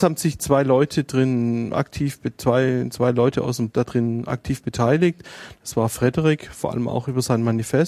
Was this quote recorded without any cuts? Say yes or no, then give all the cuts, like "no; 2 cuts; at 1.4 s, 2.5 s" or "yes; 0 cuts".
no; 1 cut; at 3.7 s